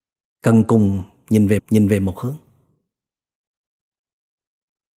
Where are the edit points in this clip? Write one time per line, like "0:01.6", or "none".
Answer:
0:01.6